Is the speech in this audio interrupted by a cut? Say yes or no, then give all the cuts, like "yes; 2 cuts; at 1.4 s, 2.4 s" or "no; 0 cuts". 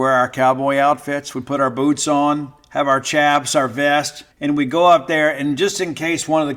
yes; 1 cut; at 4.3 s